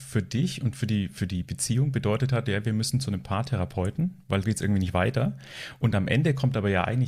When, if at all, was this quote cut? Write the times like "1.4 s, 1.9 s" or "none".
4.4 s